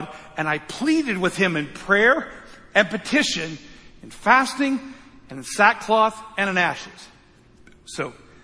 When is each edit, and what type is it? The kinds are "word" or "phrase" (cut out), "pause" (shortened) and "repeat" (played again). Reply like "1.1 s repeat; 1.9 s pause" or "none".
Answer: none